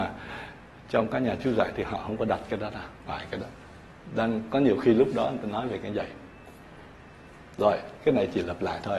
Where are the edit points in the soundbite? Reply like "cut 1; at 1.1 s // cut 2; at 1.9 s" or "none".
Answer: cut 1; at 3.1 s